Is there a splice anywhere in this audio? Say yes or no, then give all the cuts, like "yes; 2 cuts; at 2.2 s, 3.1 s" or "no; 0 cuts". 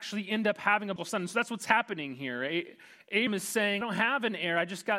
yes; 3 cuts; at 1.0 s, 3.3 s, 3.8 s